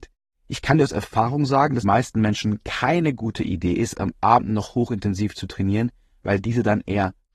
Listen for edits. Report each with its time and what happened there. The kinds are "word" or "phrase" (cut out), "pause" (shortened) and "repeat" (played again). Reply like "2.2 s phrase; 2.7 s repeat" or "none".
1.8 s phrase